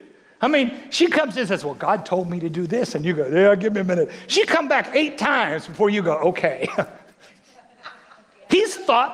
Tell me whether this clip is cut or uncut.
uncut